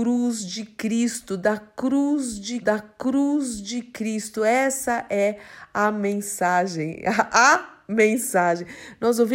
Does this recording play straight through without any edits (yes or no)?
no